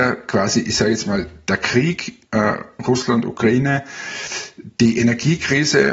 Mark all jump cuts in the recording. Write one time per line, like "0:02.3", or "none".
0:02.2